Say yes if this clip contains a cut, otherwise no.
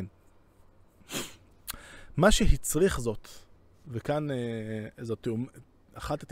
no